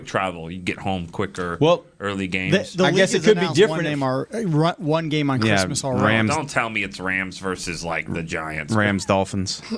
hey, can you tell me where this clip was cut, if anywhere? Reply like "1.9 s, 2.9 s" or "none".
none